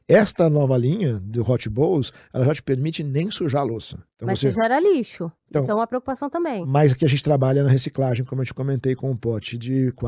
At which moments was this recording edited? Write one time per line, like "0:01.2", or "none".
0:04.1